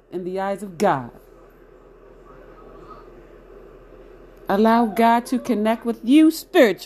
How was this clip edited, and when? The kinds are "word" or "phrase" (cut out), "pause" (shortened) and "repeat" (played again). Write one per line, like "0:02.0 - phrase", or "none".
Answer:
none